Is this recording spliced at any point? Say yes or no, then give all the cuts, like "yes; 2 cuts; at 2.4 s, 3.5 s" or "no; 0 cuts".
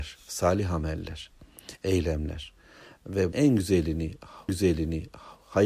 yes; 2 cuts; at 3.3 s, 4.5 s